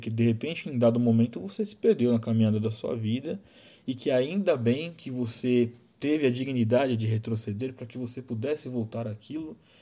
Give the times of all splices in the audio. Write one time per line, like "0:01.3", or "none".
none